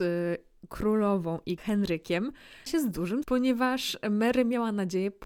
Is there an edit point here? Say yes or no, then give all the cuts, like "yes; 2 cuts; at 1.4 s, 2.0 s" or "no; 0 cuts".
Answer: yes; 3 cuts; at 1.6 s, 2.7 s, 3.2 s